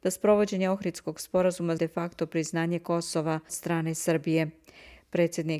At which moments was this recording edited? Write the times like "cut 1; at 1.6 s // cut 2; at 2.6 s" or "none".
cut 1; at 1.8 s // cut 2; at 3.5 s

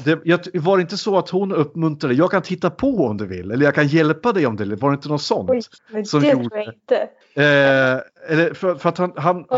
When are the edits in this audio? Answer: none

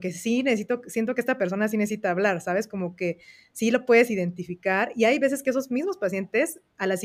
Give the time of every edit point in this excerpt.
none

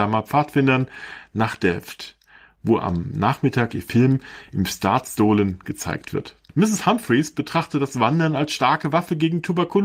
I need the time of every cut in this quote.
none

